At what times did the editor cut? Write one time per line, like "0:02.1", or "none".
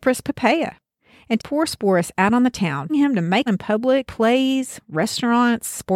0:01.4
0:02.9
0:03.5
0:04.1